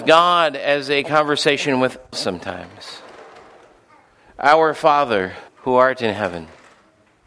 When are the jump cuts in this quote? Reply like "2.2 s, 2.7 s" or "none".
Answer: 2.1 s, 5.5 s